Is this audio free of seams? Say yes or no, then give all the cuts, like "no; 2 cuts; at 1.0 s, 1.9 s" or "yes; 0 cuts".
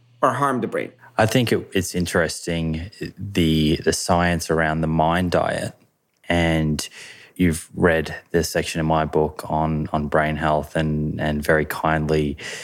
yes; 0 cuts